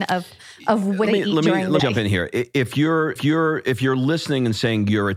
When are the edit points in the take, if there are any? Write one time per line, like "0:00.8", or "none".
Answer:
0:01.1
0:01.8
0:03.2